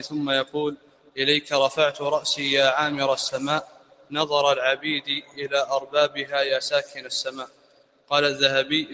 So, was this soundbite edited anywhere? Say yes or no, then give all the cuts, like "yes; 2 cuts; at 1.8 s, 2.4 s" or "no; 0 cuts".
no; 0 cuts